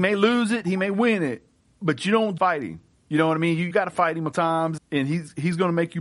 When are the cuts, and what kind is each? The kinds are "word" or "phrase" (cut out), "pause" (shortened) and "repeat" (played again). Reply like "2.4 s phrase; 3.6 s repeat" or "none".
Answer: 2.4 s word; 3.7 s word; 4.3 s word; 4.8 s word